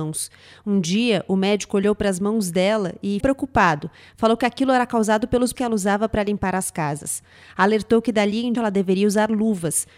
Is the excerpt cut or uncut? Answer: cut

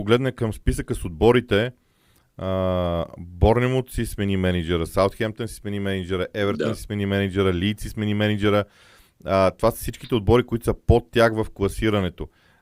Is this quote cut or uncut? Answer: uncut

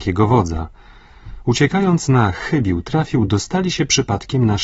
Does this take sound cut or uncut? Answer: uncut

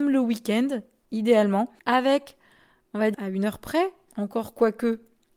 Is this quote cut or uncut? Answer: cut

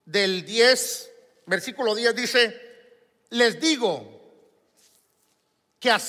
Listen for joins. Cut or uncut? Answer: uncut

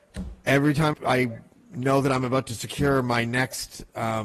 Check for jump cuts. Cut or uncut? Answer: cut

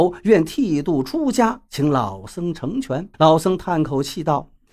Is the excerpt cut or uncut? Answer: cut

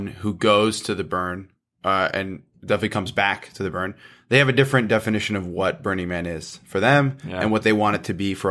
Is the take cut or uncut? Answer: uncut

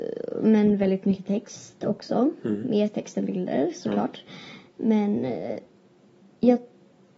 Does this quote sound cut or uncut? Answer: uncut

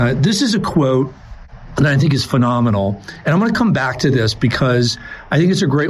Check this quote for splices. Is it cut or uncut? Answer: uncut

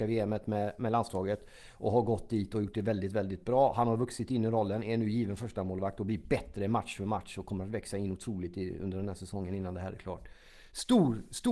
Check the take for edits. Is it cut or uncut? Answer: uncut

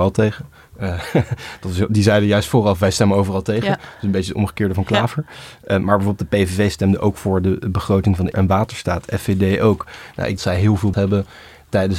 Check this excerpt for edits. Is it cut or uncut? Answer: cut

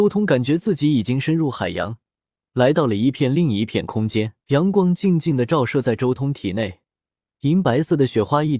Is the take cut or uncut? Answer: cut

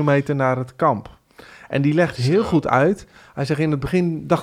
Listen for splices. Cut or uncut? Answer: uncut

